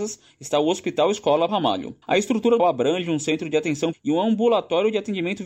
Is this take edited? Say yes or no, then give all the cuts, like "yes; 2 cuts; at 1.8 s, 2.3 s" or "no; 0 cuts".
yes; 4 cuts; at 1.5 s, 2.0 s, 2.6 s, 3.9 s